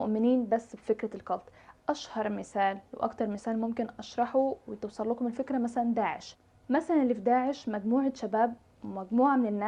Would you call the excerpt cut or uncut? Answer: uncut